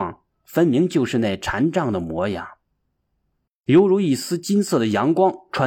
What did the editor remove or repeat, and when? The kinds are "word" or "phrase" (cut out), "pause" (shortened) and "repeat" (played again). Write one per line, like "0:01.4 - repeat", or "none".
none